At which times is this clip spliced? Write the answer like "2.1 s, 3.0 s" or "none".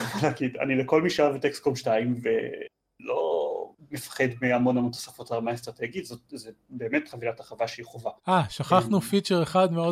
3.8 s, 8.2 s